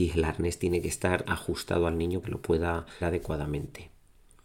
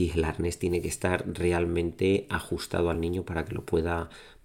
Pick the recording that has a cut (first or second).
first